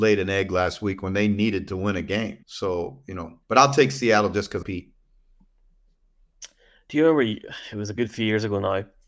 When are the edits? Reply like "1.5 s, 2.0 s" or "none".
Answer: 2.4 s, 3.4 s, 4.6 s

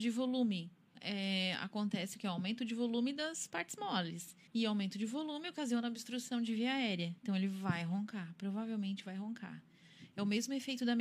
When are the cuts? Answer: 0.9 s, 4.5 s, 7.2 s

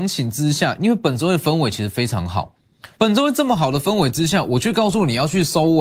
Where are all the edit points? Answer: 2.9 s

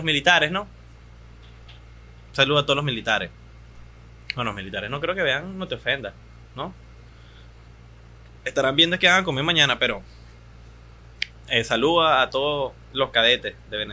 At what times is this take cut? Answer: none

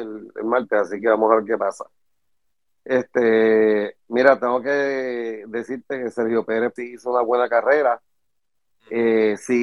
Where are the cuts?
6.8 s

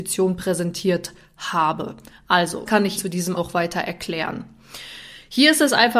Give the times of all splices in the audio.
2.7 s, 3.0 s, 3.4 s

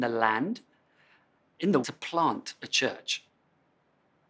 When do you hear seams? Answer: 1.8 s

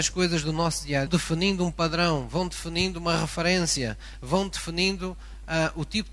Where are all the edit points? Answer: 1.1 s

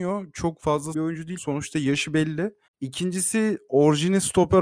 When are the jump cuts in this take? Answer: 0.9 s, 1.4 s, 2.7 s

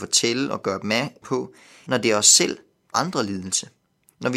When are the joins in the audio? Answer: 1.2 s, 1.9 s, 2.9 s

